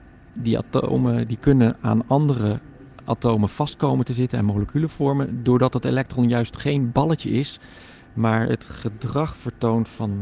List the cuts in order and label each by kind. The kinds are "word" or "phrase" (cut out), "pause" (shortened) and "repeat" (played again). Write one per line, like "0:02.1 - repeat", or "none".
none